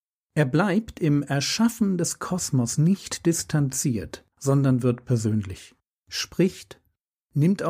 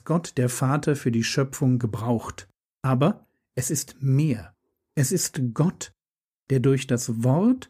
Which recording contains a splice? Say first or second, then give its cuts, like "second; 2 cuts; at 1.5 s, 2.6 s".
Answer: first; 2 cuts; at 4.3 s, 5.9 s